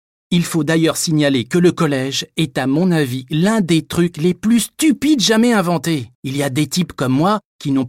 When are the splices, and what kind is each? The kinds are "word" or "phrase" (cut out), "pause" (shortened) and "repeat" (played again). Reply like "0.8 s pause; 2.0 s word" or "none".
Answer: 6.1 s pause

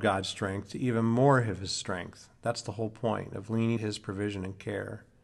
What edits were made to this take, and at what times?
3.8 s word

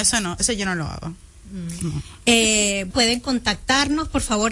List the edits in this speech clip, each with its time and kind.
2.9 s word

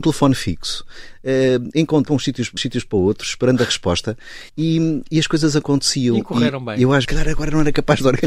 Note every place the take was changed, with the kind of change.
2.1 s phrase; 2.6 s word; 4.5 s pause; 7.0 s phrase

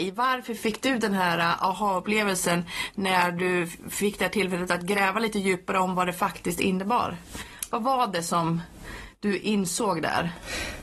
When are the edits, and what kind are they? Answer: none

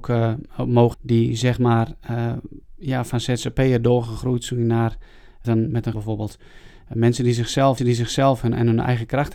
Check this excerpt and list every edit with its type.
0.9 s word; 2.6 s pause; 5.4 s phrase; 5.9 s phrase; 7.8 s repeat

